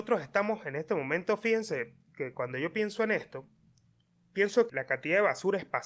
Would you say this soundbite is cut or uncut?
cut